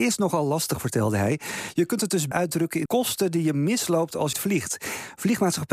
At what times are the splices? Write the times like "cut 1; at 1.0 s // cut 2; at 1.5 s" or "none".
cut 1; at 2.3 s // cut 2; at 2.9 s // cut 3; at 4.3 s